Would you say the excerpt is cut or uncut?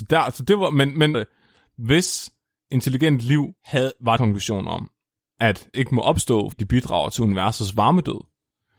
cut